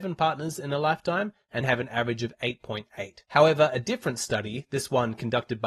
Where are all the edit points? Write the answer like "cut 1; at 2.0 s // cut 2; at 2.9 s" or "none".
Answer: cut 1; at 1.6 s